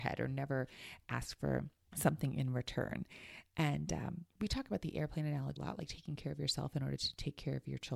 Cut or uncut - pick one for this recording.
cut